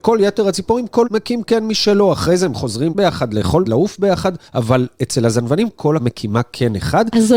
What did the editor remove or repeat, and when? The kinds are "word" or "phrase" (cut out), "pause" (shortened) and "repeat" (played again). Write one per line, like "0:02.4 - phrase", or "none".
0:01.0 - word
0:02.9 - word
0:03.6 - word
0:04.5 - pause
0:06.0 - word